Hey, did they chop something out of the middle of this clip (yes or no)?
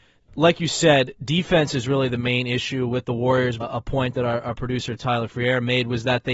yes